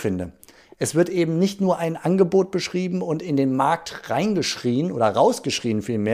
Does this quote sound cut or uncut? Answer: uncut